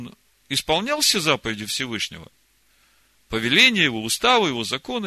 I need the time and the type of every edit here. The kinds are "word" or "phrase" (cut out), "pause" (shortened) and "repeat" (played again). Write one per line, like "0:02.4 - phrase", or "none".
none